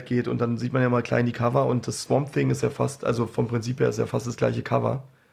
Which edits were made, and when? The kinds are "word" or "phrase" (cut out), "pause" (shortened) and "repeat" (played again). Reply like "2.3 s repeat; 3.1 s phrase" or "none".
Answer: none